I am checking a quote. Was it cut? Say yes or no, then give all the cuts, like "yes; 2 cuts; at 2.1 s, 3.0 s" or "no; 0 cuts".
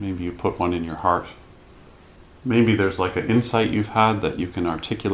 no; 0 cuts